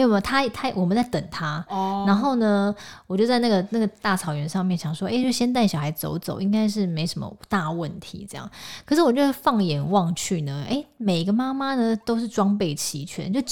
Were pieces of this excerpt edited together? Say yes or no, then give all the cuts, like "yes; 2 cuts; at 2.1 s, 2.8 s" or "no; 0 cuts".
no; 0 cuts